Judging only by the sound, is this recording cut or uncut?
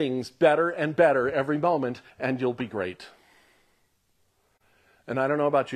cut